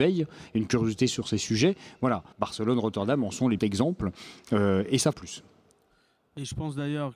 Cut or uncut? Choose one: cut